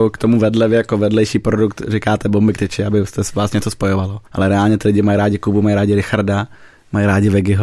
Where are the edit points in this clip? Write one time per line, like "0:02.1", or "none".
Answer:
0:04.3